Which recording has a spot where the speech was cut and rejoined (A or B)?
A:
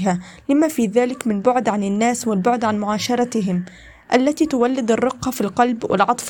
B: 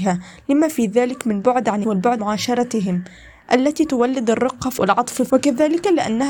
B